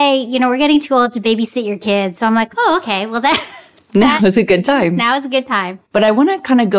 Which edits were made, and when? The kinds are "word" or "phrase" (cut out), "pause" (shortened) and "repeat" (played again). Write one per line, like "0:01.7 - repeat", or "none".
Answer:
0:05.9 - pause